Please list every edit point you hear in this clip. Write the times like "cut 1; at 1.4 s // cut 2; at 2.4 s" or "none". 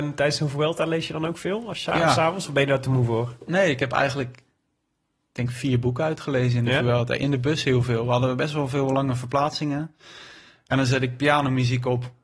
none